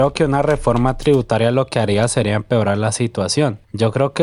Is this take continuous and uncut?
yes; 0 cuts

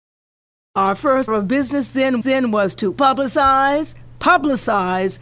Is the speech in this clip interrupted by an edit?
yes; 2 cuts; at 1.3 s, 2.2 s

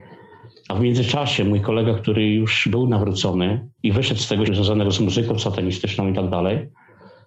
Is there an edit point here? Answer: yes; 2 cuts; at 3.7 s, 4.4 s

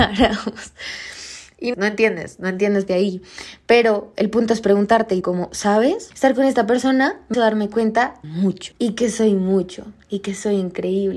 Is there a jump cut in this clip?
yes; 5 cuts; at 1.7 s, 2.9 s, 5.2 s, 7.3 s, 8.2 s

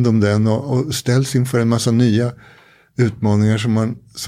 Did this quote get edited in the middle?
no; 0 cuts

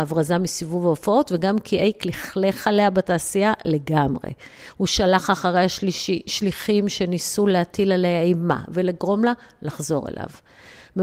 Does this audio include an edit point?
no; 0 cuts

